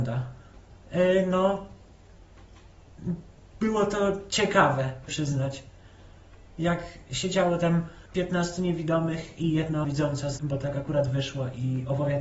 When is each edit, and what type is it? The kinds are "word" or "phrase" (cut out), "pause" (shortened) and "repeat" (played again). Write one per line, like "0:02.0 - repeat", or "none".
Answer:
0:05.1 - word
0:08.1 - word
0:09.8 - word
0:10.4 - word